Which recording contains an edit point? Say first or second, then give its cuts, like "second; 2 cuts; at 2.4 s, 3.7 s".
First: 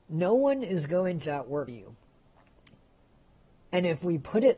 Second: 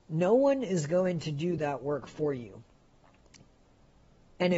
first; 2 cuts; at 1.2 s, 1.7 s